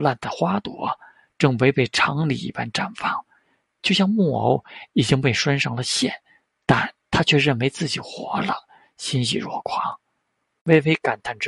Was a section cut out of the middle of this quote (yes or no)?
yes